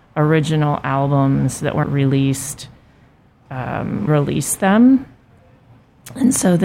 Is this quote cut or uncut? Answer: cut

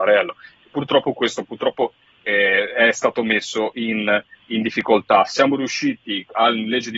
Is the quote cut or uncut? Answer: uncut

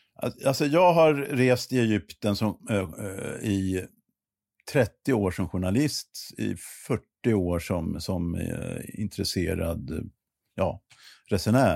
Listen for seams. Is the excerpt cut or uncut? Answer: uncut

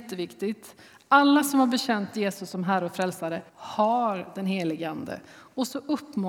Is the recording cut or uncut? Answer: cut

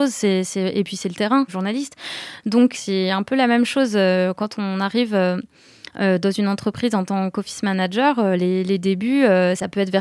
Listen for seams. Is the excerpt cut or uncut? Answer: cut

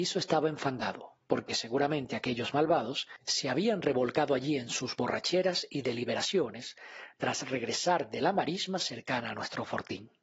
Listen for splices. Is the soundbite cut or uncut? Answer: uncut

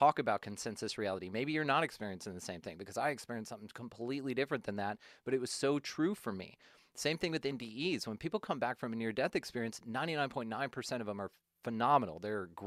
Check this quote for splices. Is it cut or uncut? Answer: uncut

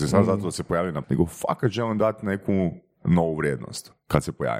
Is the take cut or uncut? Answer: cut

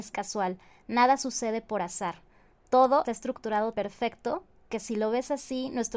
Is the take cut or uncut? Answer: cut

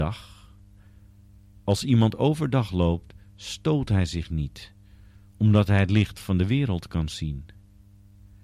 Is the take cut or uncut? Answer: uncut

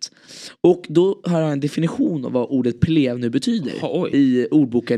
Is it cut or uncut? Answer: uncut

